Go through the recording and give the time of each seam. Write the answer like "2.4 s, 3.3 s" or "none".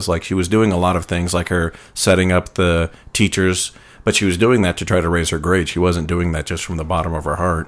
none